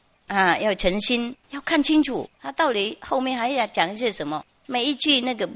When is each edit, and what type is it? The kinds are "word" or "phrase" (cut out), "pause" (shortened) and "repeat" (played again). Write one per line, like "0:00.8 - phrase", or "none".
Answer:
0:01.4 - pause
0:02.3 - pause